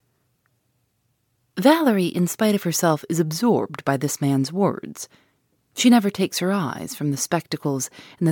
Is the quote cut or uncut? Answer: uncut